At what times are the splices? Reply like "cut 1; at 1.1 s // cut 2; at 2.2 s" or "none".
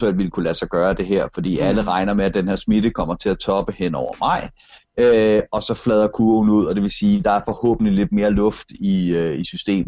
none